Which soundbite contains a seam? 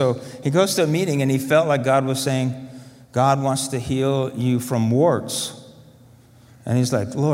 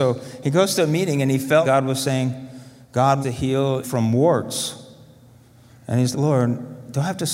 second; 4 cuts; at 1.6 s, 3.2 s, 3.8 s, 6.1 s

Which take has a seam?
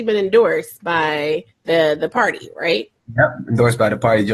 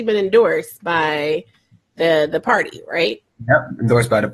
first; 1 cut; at 1.5 s

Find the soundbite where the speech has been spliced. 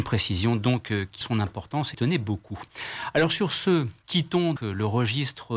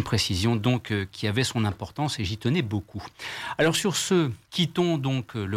first; 3 cuts; at 1.2 s, 1.9 s, 4.6 s

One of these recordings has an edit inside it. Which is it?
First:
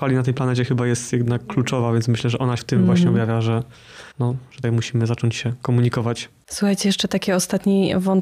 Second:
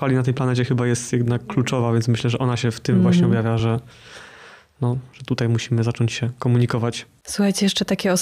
first; 3 cuts; at 2.6 s, 4.1 s, 4.6 s

